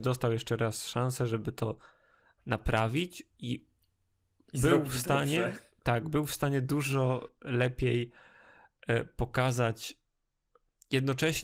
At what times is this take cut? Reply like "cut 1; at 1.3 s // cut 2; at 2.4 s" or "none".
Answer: none